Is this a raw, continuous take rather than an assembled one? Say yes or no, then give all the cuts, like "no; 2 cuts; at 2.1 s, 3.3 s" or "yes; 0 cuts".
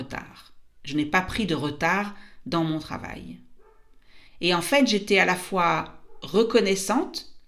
no; 1 cut; at 4.3 s